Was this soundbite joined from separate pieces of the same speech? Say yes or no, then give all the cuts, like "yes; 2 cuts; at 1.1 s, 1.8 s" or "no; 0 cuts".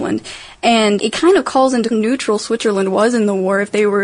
yes; 2 cuts; at 1.0 s, 1.9 s